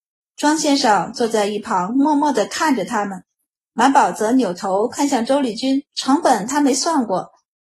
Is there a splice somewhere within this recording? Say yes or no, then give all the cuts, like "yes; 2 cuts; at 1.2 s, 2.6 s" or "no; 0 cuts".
yes; 1 cut; at 5.9 s